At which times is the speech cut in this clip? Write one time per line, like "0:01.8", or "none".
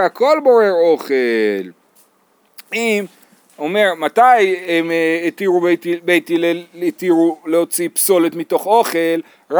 none